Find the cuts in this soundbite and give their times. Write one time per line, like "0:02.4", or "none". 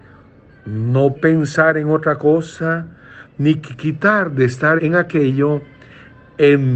0:01.1
0:04.8